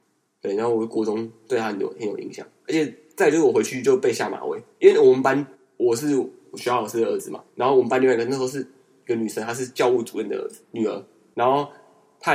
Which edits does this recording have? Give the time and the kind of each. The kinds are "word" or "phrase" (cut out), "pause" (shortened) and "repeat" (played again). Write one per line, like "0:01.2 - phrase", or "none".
0:04.7 - pause
0:05.5 - pause
0:07.5 - pause

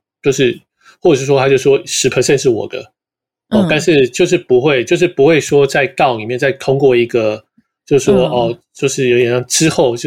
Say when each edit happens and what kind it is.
none

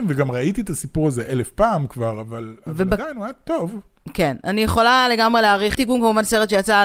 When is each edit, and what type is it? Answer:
0:05.7 - word

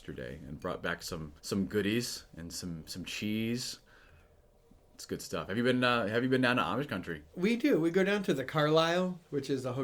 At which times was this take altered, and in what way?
0:01.4 - pause

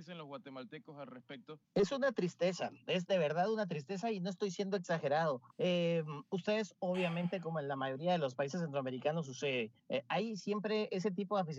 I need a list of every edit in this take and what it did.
0:01.6 - pause
0:05.5 - pause
0:09.8 - pause

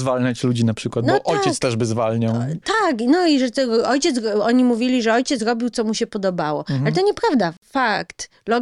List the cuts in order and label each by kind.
none

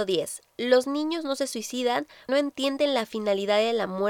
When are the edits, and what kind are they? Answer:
0:02.3 - word

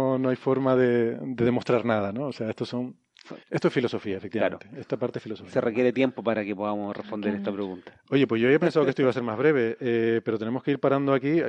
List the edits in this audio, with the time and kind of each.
0:03.4 - pause

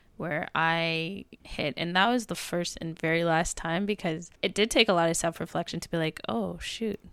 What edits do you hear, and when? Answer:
0:01.4 - pause
0:04.4 - pause

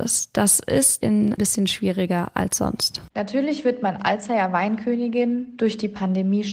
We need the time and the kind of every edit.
0:01.0 - word
0:01.4 - phrase
0:03.1 - pause
0:04.0 - phrase

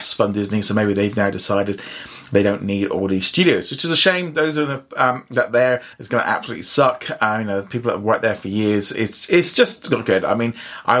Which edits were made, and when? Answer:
0:05.9 - pause

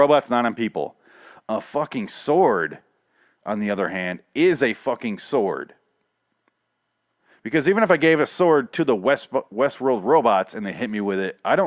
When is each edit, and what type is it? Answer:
none

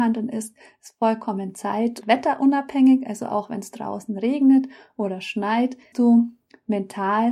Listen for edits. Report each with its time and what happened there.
0:02.0 - word
0:05.9 - word

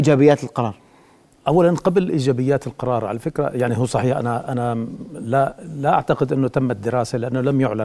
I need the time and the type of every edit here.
none

